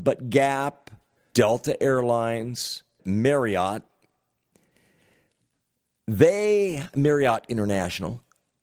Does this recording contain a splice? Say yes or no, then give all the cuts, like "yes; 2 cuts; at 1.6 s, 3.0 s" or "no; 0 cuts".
yes; 2 cuts; at 1.3 s, 3.0 s